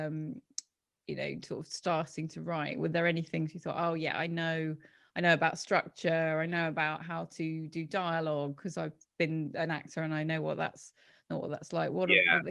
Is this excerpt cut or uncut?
uncut